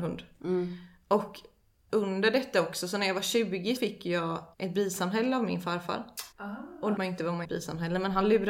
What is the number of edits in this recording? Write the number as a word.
six